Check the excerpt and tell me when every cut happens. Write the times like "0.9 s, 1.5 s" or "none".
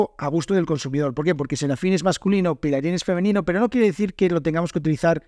none